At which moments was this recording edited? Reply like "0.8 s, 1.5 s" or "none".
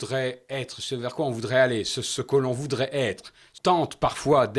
3.6 s